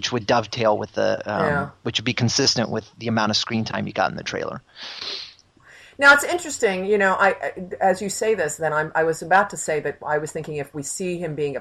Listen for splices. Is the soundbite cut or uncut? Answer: uncut